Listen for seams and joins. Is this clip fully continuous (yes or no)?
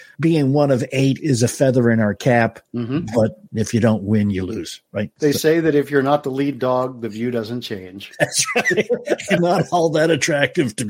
no